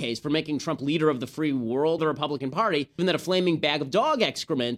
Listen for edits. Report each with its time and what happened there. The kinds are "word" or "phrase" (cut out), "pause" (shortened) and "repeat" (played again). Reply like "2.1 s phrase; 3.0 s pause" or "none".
2.0 s word; 3.0 s word